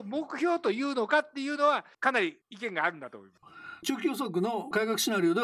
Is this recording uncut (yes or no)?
no